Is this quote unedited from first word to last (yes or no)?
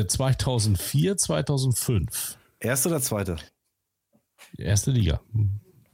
yes